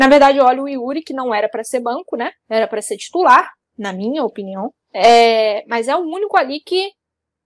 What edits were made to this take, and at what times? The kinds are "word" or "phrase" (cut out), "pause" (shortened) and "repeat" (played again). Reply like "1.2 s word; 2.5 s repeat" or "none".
2.4 s pause; 4.8 s pause